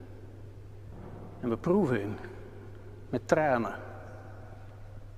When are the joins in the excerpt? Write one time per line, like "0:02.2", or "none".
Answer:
none